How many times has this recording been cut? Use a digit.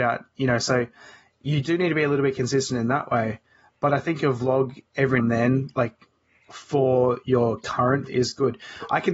2